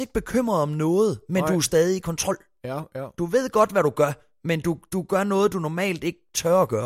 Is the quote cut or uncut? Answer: uncut